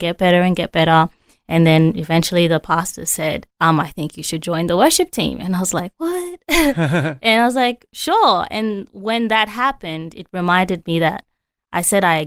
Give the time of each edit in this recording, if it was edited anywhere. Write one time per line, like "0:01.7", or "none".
0:03.5